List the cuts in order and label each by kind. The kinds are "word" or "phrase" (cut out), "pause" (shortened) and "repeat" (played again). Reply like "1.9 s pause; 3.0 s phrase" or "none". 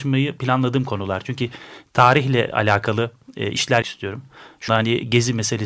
3.8 s word; 4.7 s word